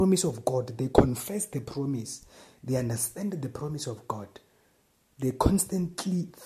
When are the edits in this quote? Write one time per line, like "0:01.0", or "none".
none